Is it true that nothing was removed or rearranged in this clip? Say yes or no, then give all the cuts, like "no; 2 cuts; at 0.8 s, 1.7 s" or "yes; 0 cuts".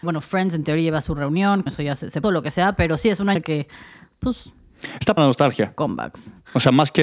no; 5 cuts; at 1.0 s, 1.7 s, 2.2 s, 3.4 s, 5.2 s